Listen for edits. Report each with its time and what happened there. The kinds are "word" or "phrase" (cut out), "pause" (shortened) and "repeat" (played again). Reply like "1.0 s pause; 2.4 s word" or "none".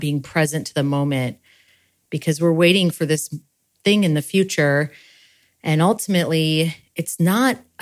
none